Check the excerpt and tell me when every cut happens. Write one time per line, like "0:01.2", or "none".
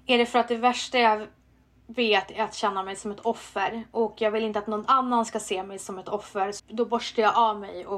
0:06.6